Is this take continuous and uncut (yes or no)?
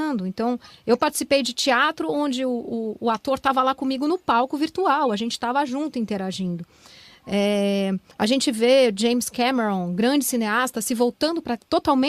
no